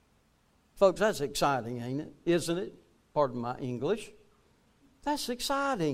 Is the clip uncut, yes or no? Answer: yes